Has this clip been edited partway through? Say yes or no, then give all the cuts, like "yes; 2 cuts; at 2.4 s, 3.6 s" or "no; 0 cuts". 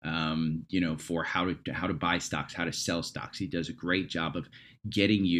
no; 0 cuts